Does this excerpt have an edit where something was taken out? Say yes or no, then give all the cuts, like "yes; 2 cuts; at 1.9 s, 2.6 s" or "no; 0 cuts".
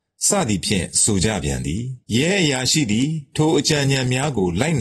yes; 1 cut; at 2.0 s